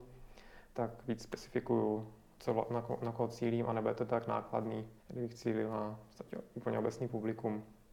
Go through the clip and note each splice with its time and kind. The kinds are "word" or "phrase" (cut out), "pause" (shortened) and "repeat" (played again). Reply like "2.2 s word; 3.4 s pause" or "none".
2.4 s word; 5.0 s pause